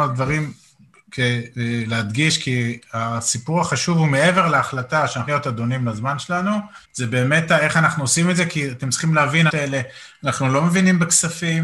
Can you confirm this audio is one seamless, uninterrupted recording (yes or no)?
no